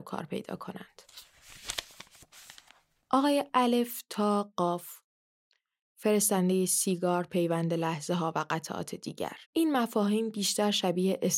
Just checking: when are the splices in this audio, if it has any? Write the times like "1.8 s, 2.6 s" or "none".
9.4 s